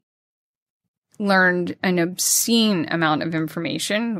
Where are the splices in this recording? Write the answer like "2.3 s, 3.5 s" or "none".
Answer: 1.8 s